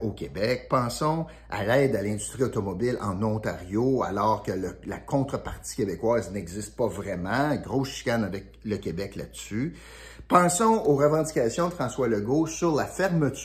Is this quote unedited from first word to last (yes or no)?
yes